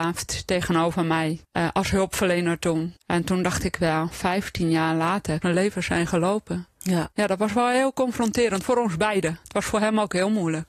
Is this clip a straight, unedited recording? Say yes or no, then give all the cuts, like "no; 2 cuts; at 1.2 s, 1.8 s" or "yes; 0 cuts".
no; 4 cuts; at 1.4 s, 3.0 s, 5.4 s, 7.1 s